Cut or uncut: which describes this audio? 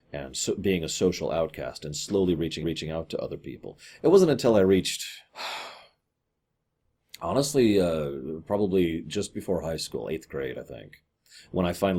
cut